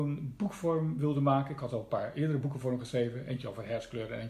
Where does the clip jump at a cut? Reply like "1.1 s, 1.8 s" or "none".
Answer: none